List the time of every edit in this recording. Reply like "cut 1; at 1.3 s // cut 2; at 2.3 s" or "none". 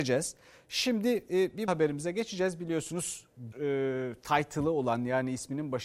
cut 1; at 1.7 s // cut 2; at 3.5 s